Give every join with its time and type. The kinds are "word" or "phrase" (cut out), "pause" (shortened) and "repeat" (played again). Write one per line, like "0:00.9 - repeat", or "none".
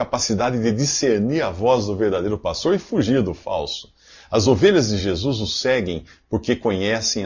none